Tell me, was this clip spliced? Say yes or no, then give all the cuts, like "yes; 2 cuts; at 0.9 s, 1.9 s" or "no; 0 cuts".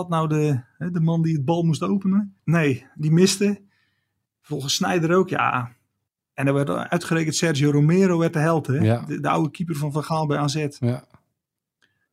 yes; 1 cut; at 2.4 s